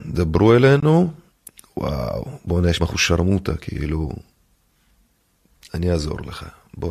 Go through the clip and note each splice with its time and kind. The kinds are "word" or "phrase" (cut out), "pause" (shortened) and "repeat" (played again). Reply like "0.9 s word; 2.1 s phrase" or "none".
1.3 s pause; 2.8 s phrase